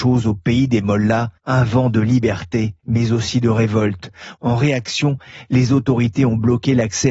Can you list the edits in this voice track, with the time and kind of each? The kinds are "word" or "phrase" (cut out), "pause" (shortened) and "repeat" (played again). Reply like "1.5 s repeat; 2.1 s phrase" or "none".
1.4 s pause; 2.8 s pause